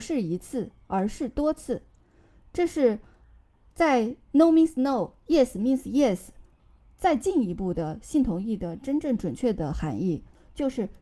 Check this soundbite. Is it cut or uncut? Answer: uncut